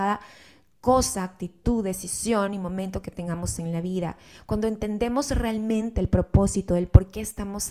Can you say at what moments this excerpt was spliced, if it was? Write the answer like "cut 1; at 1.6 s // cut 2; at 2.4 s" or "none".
none